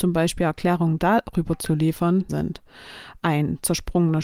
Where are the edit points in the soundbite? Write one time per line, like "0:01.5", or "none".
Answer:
0:02.3